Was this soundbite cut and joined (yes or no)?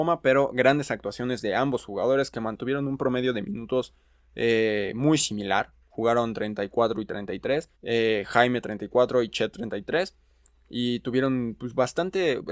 yes